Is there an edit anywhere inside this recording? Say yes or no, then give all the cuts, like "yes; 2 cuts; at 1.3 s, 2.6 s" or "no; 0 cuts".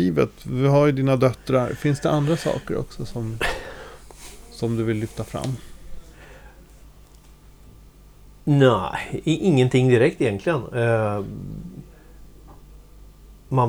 no; 0 cuts